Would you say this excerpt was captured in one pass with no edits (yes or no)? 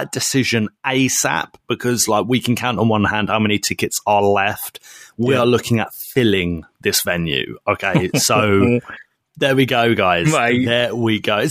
yes